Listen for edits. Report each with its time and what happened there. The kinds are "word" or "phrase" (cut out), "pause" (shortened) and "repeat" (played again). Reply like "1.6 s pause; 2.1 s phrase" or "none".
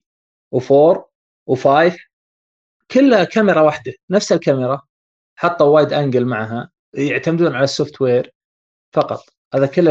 none